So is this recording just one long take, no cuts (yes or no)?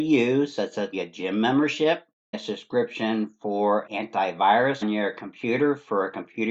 no